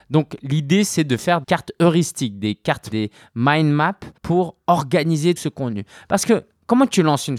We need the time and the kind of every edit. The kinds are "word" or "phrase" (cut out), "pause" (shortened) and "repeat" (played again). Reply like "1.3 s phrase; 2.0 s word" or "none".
1.4 s word; 2.9 s word; 4.2 s pause; 5.4 s word